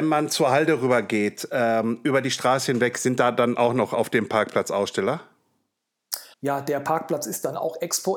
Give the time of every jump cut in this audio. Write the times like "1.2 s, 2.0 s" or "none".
6.3 s

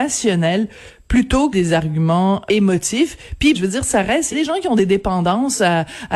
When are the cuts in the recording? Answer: 1.5 s, 2.5 s, 3.5 s, 4.3 s

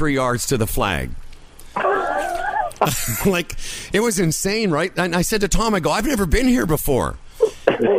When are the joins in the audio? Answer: none

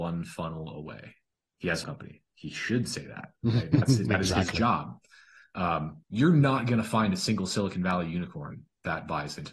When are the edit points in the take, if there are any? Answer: 1.3 s, 1.8 s, 6.0 s

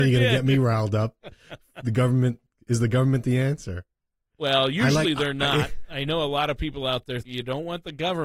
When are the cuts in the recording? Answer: 7.2 s

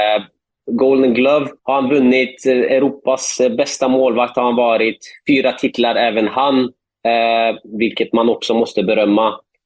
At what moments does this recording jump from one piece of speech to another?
1.6 s

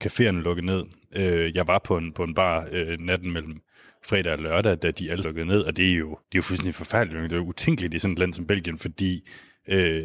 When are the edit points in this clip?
5.2 s, 6.2 s

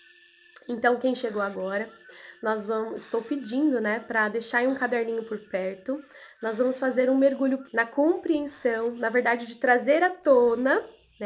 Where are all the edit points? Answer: 7.6 s

